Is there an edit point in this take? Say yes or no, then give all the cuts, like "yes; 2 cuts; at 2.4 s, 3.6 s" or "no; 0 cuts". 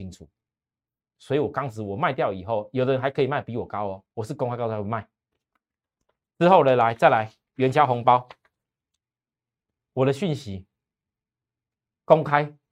yes; 1 cut; at 4.1 s